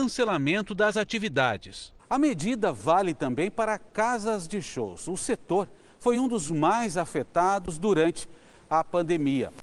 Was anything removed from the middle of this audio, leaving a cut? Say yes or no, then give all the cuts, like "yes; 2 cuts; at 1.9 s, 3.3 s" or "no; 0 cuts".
no; 0 cuts